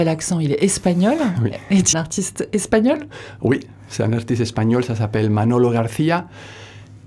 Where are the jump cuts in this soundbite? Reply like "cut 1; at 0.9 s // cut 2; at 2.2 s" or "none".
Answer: cut 1; at 1.9 s